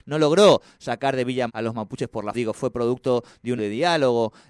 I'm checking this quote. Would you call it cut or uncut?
cut